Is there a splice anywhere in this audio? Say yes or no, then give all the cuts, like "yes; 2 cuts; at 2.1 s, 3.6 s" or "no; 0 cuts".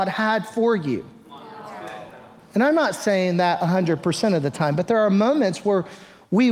no; 0 cuts